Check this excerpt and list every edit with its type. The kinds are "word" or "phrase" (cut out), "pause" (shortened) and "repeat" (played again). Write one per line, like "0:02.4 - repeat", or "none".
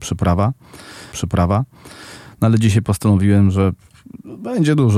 0:01.1 - repeat